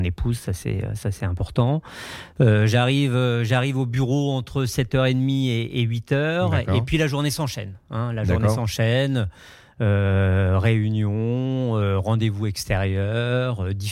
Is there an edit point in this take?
no; 0 cuts

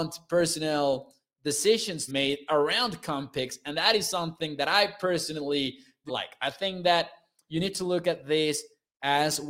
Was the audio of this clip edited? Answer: yes; 2 cuts; at 2.1 s, 6.1 s

